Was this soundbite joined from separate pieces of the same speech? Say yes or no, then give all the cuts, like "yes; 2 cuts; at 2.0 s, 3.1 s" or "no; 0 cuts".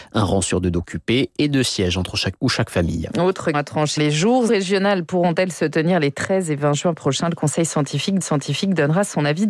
yes; 5 cuts; at 2.4 s, 3.5 s, 4.0 s, 4.5 s, 8.2 s